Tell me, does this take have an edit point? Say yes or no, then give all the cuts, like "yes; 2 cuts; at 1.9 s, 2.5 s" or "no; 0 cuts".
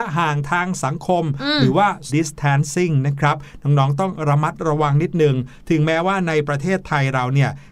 yes; 1 cut; at 2.1 s